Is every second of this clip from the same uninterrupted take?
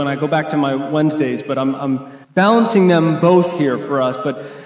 no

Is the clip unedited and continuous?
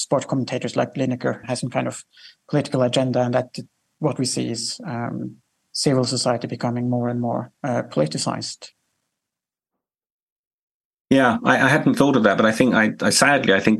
no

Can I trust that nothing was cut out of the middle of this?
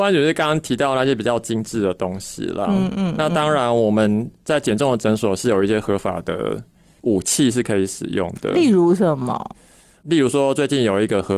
yes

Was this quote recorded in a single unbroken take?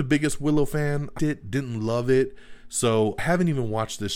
no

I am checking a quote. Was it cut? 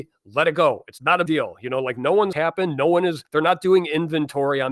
yes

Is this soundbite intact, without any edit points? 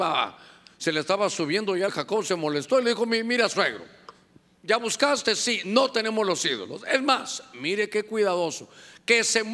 no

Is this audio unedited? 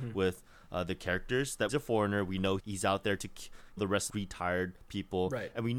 no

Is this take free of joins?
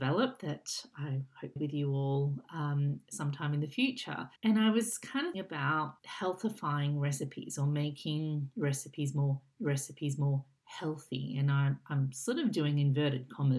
no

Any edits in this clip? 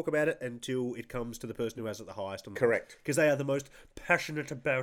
no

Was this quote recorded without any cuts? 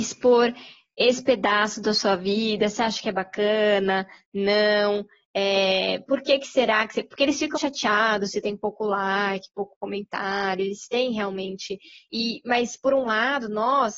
no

